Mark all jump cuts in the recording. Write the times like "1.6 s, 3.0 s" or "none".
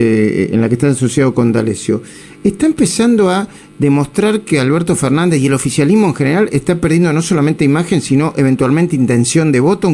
none